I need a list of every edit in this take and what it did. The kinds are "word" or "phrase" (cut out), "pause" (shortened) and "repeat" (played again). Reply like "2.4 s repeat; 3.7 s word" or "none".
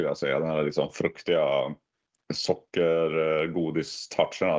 none